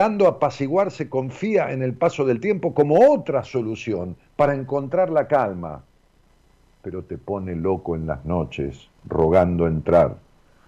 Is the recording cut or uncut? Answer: cut